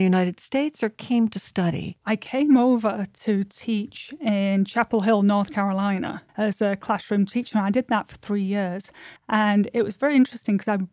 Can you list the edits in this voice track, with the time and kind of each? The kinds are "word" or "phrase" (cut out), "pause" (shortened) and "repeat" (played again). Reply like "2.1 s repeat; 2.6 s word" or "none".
6.3 s pause; 9.2 s pause